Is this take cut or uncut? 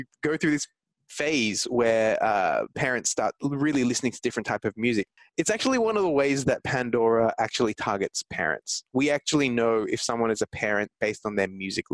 uncut